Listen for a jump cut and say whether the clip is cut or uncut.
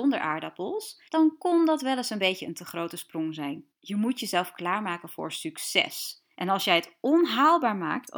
cut